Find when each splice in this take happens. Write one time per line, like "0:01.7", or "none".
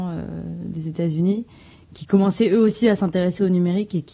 none